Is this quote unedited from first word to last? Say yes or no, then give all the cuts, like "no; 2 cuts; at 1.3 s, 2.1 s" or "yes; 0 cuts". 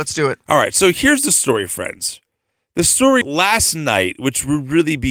no; 1 cut; at 3.2 s